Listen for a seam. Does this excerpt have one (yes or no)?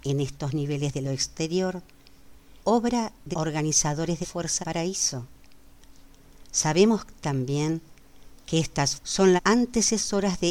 yes